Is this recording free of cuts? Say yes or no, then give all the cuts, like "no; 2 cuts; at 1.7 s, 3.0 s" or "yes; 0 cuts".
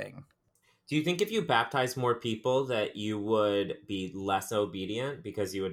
yes; 0 cuts